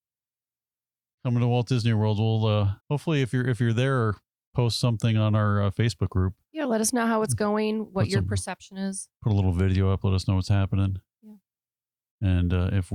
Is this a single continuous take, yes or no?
no